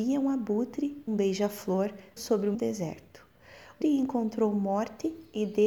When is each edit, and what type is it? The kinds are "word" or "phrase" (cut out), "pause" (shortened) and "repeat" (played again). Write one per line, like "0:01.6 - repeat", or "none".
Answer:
0:01.1 - word
0:02.2 - word
0:02.5 - word
0:03.8 - word